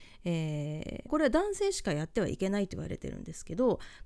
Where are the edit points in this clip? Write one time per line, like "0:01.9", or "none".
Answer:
0:01.1